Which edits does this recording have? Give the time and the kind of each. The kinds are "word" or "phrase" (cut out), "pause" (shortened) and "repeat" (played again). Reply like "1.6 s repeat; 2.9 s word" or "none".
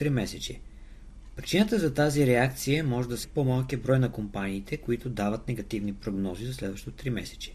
3.2 s word

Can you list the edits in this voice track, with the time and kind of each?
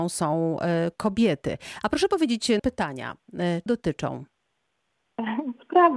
2.6 s word; 3.7 s word

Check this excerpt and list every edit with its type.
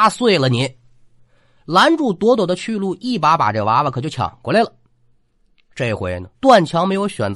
6.3 s pause

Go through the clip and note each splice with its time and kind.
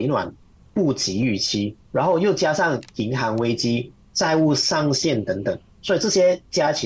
1.8 s pause

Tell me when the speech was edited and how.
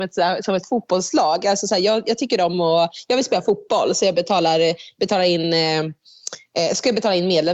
none

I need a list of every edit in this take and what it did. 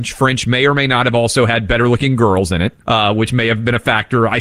2.8 s pause

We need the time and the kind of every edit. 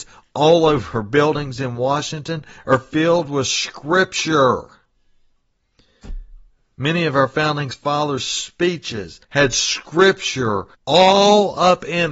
6.5 s pause; 9.2 s pause; 10.7 s pause

